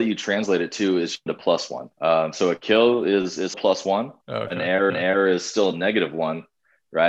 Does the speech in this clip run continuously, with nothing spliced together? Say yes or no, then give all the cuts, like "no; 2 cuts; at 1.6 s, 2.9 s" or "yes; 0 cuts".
no; 5 cuts; at 1.3 s, 1.9 s, 3.5 s, 4.2 s, 4.9 s